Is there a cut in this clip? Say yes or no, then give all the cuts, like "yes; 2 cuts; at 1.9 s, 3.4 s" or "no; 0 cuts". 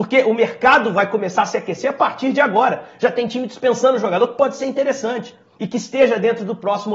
no; 0 cuts